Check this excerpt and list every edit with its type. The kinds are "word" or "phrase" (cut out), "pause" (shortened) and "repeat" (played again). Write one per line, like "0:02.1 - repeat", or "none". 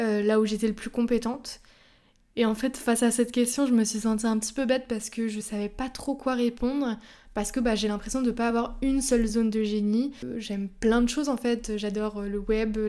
none